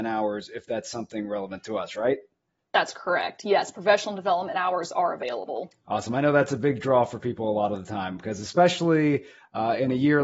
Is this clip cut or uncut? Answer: uncut